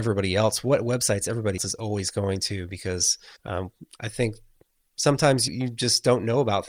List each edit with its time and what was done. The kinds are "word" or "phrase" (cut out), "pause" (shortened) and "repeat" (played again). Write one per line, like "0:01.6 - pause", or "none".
0:01.6 - word
0:03.4 - pause
0:05.5 - word